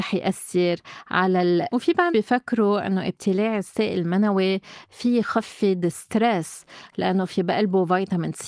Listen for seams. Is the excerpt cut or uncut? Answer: cut